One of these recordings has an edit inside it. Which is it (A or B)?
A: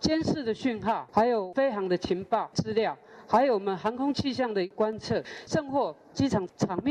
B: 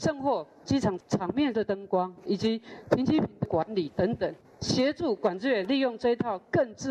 A